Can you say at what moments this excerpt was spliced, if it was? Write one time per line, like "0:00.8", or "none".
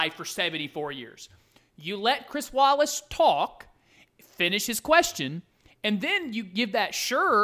none